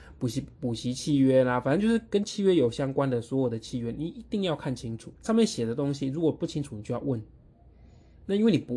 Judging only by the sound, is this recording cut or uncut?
cut